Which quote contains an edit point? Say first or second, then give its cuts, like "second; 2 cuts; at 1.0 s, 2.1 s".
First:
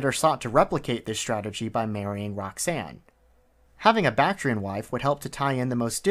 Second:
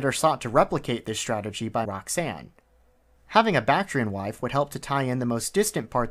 second; 1 cut; at 1.8 s